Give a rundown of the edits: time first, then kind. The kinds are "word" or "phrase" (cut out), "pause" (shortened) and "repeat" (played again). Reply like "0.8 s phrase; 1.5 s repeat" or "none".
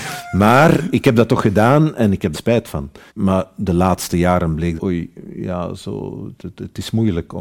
2.3 s phrase; 3.1 s pause; 4.8 s word

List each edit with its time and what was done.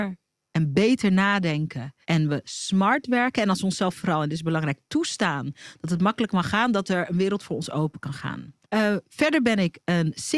2.0 s pause; 8.6 s pause

